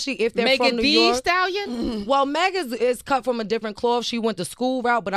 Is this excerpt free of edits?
yes; 0 cuts

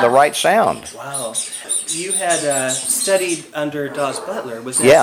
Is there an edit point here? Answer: no; 0 cuts

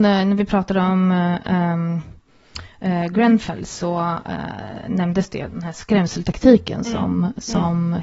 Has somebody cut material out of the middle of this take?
no; 0 cuts

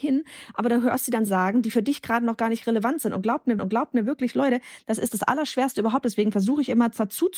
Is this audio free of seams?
no; 2 cuts; at 1.3 s, 3.6 s

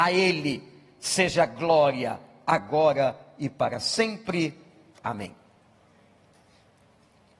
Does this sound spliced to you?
no; 0 cuts

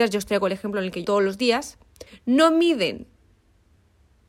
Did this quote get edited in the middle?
yes; 2 cuts; at 1.0 s, 2.1 s

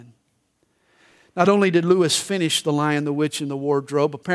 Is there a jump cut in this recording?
no; 0 cuts

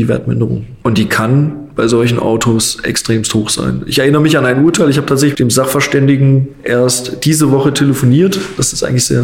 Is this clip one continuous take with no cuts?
yes; 0 cuts

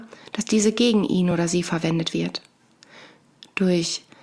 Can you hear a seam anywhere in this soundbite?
no; 0 cuts

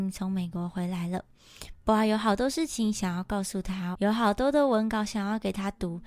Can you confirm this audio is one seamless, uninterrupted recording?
no; 1 cut; at 3.9 s

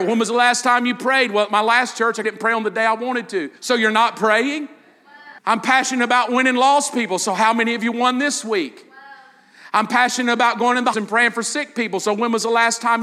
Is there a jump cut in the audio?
yes; 4 cuts; at 2.2 s, 3.6 s, 5.4 s, 10.9 s

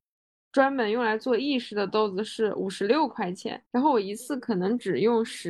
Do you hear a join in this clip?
yes; 1 cut; at 3.7 s

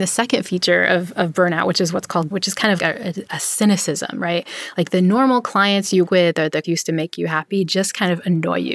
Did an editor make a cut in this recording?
yes; 4 cuts; at 2.3 s, 2.8 s, 6.1 s, 6.6 s

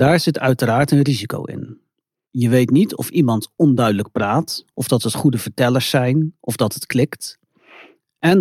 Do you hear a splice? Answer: no; 0 cuts

